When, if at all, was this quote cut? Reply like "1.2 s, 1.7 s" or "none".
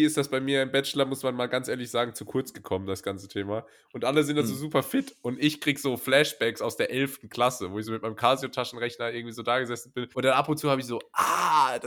10.1 s